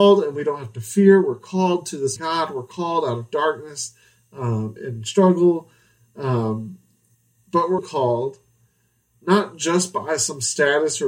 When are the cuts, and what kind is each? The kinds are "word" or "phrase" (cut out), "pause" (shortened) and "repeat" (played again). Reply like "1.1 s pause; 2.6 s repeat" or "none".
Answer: 2.2 s word; 4.8 s word; 7.1 s pause; 7.8 s word